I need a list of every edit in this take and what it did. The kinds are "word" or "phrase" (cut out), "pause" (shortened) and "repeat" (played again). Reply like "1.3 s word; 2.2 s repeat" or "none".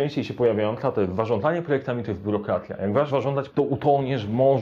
3.1 s word; 3.5 s word